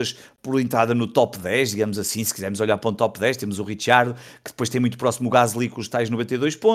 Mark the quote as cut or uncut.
uncut